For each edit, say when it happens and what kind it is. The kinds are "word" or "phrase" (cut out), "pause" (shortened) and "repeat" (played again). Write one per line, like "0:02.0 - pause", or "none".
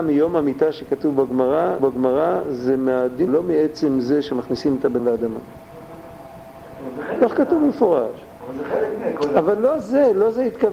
0:01.8 - repeat
0:03.3 - phrase
0:05.0 - word